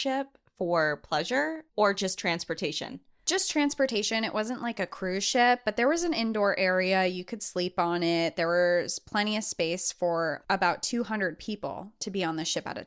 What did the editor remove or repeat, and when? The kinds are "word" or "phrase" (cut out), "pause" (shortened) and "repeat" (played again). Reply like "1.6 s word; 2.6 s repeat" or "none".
1.7 s pause